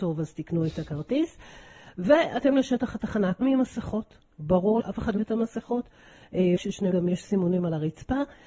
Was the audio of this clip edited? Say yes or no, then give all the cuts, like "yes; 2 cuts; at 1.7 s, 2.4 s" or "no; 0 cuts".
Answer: yes; 6 cuts; at 2.5 s, 3.4 s, 4.8 s, 5.2 s, 6.6 s, 6.9 s